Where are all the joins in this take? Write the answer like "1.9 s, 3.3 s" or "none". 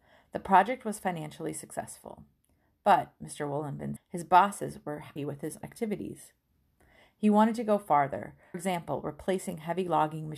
4.0 s, 5.2 s, 5.6 s, 8.5 s